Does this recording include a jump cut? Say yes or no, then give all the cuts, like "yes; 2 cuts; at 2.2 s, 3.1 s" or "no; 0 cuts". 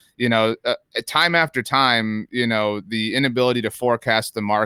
no; 0 cuts